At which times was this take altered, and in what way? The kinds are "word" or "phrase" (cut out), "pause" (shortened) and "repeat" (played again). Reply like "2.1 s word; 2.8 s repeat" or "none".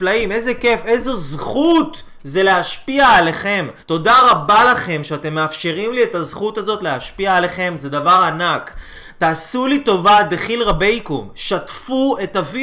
3.8 s pause